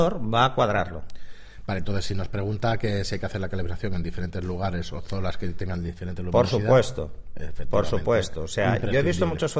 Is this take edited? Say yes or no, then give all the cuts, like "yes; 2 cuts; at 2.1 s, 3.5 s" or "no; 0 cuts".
no; 0 cuts